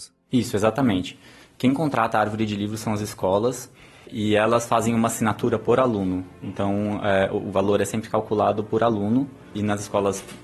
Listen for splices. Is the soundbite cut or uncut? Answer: uncut